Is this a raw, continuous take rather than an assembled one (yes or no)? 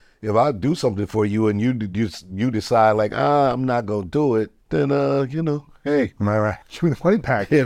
no